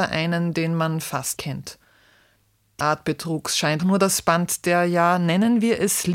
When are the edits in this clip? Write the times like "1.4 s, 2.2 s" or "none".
1.4 s, 2.8 s, 3.8 s